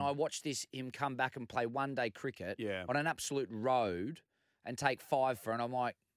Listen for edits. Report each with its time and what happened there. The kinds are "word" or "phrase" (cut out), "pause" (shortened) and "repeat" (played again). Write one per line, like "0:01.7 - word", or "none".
none